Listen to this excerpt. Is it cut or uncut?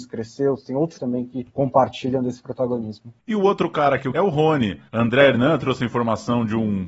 cut